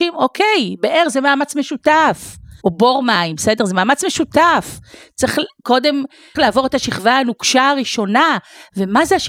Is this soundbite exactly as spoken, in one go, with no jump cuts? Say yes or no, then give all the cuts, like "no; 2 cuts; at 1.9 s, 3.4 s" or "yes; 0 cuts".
no; 2 cuts; at 2.6 s, 6.4 s